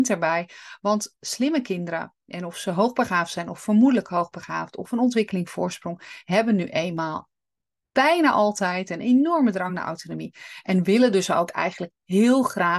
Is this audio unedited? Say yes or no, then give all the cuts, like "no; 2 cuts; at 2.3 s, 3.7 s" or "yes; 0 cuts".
yes; 0 cuts